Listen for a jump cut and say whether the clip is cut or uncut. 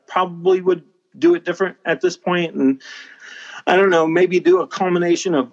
uncut